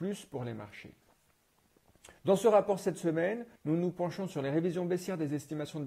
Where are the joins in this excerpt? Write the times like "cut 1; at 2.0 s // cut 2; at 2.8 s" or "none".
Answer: cut 1; at 2.2 s // cut 2; at 3.6 s